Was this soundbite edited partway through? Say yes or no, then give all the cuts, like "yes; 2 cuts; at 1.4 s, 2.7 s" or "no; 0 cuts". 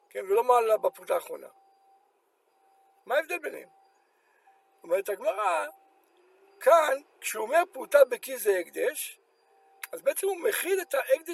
no; 0 cuts